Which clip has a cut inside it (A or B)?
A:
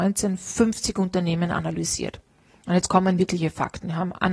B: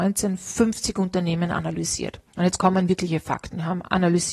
B